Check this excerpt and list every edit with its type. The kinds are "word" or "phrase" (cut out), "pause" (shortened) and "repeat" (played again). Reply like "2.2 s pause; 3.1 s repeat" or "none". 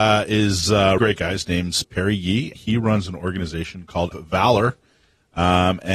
1.0 s word; 1.8 s word; 2.5 s word; 4.1 s word